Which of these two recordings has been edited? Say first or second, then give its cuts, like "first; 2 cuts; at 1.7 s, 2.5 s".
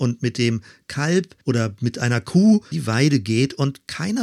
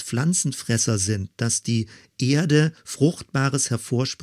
first; 2 cuts; at 1.4 s, 2.7 s